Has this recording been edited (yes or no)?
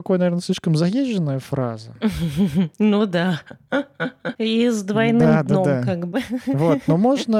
no